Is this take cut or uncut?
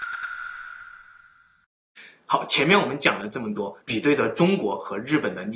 cut